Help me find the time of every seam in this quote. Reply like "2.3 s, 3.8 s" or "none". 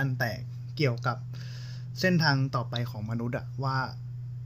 none